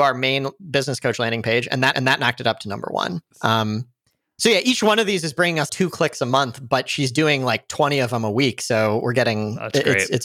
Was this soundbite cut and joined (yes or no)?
yes